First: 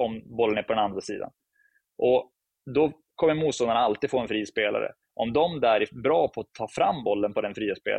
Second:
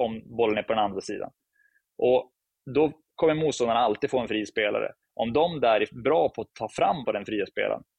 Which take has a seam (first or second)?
second